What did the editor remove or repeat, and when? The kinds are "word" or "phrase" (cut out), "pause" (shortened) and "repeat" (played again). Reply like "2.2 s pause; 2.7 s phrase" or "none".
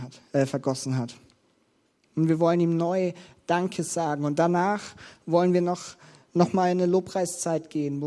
none